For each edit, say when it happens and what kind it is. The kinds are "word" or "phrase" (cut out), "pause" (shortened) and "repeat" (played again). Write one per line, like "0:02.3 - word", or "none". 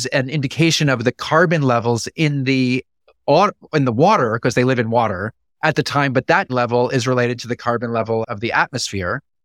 0:05.5 - pause
0:06.5 - word